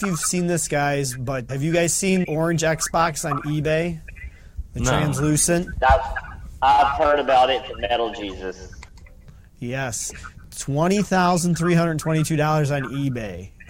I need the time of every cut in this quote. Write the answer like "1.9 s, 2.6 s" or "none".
1.5 s, 2.2 s